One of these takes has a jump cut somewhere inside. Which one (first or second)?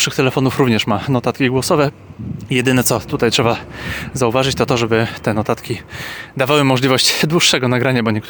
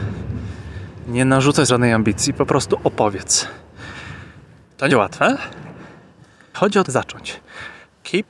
second